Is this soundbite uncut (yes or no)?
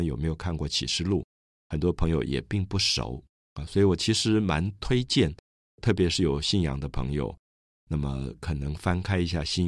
yes